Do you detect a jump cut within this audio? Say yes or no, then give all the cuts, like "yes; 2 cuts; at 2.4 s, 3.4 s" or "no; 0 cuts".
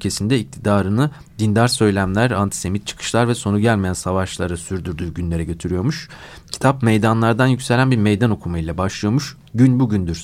no; 0 cuts